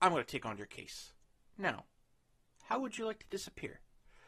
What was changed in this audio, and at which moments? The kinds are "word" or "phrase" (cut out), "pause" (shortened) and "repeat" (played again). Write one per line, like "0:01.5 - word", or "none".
none